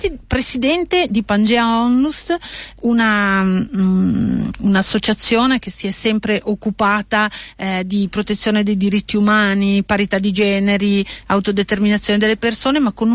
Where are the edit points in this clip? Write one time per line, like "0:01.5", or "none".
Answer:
0:01.2
0:02.8